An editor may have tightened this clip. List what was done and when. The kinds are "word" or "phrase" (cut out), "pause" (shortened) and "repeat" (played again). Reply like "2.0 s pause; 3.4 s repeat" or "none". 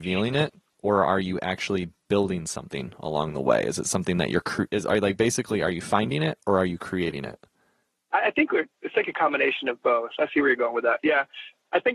none